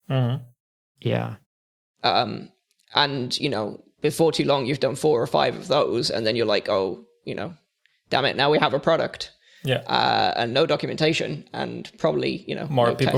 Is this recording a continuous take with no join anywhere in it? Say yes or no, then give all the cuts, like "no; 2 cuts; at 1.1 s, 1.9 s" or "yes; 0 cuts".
yes; 0 cuts